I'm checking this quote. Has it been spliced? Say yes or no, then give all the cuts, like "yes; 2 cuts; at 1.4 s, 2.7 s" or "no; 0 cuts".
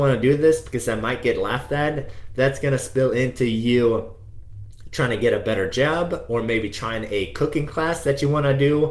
no; 0 cuts